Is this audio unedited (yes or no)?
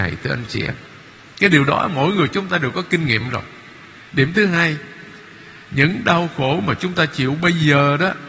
yes